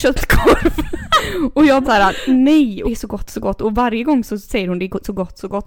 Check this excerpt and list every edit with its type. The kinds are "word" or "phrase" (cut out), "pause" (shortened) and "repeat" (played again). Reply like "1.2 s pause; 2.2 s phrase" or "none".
1.8 s word; 2.8 s phrase